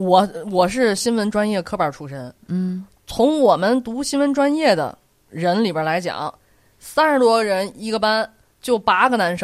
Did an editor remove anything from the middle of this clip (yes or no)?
no